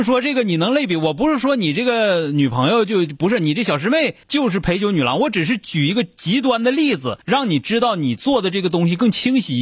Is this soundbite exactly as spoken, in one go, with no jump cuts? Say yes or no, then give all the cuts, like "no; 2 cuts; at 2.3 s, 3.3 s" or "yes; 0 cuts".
no; 2 cuts; at 4.2 s, 7.2 s